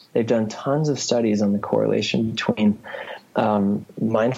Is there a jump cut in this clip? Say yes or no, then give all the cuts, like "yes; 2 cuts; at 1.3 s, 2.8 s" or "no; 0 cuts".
no; 0 cuts